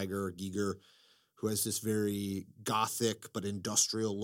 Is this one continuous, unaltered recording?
yes; 0 cuts

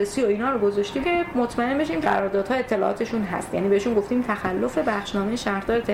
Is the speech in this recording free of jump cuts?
no; 2 cuts; at 1.0 s, 2.0 s

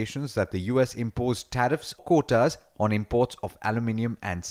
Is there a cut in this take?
yes; 1 cut; at 2.0 s

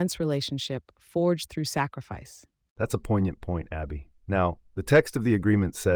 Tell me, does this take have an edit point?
yes; 1 cut; at 4.2 s

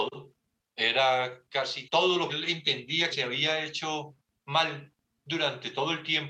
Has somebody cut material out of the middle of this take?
yes; 3 cuts; at 1.8 s, 2.3 s, 3.1 s

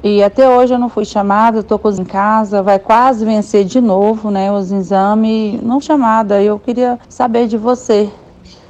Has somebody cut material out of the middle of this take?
yes; 3 cuts; at 2.0 s, 5.8 s, 7.0 s

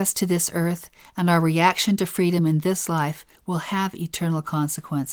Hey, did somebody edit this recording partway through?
no; 0 cuts

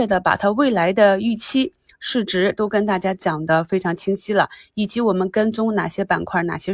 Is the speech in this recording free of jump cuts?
yes; 0 cuts

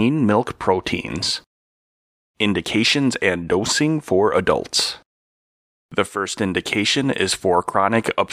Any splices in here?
no; 0 cuts

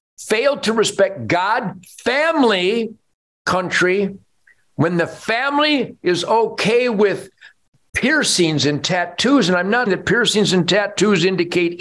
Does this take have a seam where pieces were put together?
yes; 1 cut; at 9.9 s

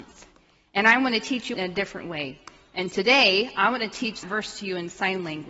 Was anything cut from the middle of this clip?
yes; 2 cuts; at 1.5 s, 4.2 s

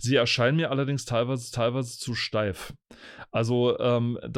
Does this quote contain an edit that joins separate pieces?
yes; 1 cut; at 1.5 s

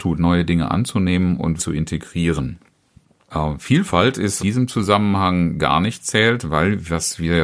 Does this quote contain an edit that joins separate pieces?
yes; 2 cuts; at 1.6 s, 4.4 s

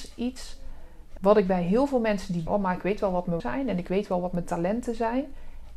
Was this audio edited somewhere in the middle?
yes; 3 cuts; at 1.2 s, 2.5 s, 3.4 s

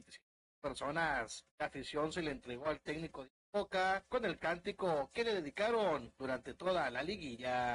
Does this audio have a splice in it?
yes; 1 cut; at 1.5 s

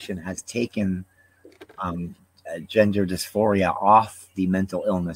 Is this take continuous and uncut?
yes; 0 cuts

